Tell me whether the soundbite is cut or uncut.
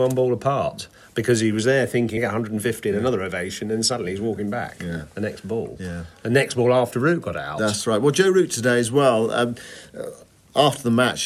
cut